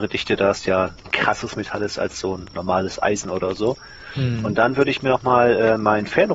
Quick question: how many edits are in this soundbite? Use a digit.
0